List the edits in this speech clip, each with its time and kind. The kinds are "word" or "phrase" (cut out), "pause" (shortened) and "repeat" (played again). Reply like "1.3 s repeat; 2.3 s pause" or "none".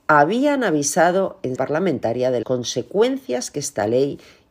1.6 s word; 2.4 s word